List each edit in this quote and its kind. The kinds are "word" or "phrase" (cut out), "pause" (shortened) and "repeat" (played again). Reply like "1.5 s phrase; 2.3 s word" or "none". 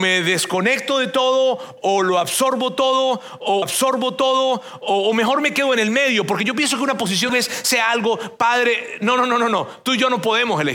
3.6 s repeat; 7.3 s phrase